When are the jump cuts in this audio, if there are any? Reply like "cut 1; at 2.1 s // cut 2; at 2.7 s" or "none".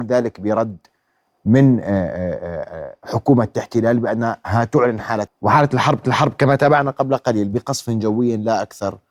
cut 1; at 5.3 s // cut 2; at 6.0 s